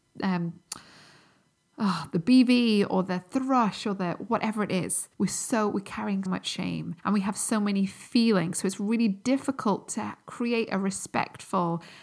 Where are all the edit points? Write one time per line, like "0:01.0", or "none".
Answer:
0:05.1
0:06.3
0:07.0